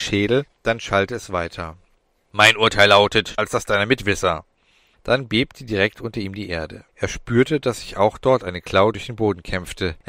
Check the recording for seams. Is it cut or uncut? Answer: cut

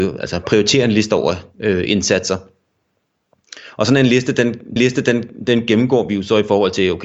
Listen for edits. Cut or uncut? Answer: cut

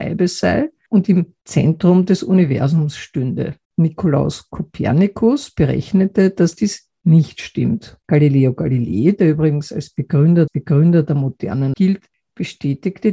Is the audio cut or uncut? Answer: cut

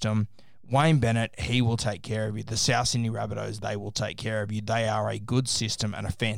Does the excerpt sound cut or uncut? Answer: uncut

